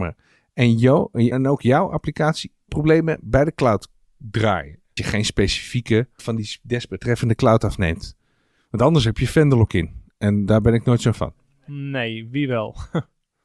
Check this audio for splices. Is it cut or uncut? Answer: cut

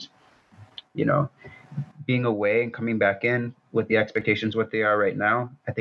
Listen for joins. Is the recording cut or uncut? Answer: uncut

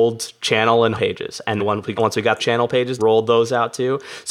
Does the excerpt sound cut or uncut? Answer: cut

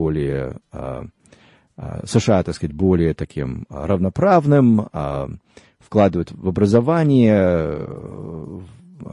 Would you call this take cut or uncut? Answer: uncut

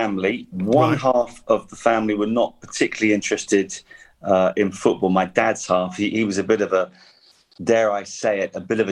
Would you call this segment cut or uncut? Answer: uncut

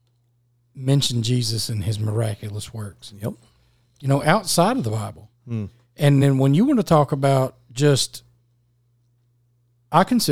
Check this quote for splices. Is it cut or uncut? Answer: uncut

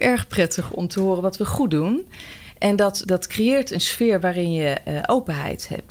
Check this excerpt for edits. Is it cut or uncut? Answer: cut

